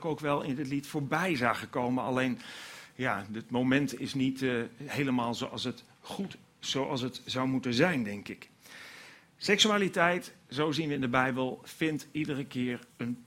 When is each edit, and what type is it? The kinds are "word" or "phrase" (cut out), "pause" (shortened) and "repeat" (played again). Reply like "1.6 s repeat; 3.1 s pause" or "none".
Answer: none